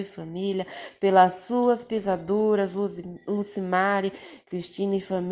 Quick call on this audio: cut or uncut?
uncut